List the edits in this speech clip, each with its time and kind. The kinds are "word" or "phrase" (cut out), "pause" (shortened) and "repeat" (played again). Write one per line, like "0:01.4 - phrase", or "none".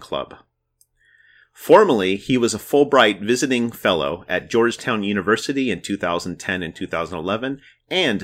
none